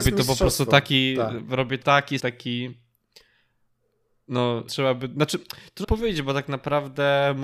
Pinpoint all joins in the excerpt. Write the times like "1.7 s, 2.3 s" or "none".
1.8 s, 2.2 s, 4.7 s, 5.8 s